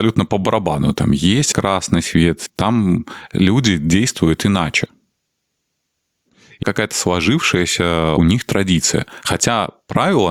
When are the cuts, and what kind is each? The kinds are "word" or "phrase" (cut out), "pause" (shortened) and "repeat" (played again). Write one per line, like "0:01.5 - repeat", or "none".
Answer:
0:01.5 - word
0:06.6 - word
0:08.2 - word